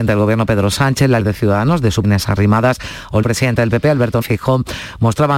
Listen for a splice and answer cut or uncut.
cut